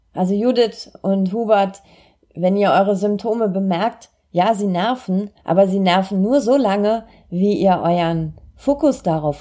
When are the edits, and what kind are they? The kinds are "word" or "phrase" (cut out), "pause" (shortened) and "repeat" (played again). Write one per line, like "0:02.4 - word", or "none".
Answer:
0:05.4 - pause